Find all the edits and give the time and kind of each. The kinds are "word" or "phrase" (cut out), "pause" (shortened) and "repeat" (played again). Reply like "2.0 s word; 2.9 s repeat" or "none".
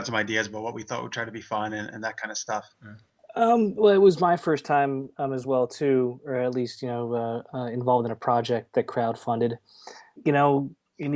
none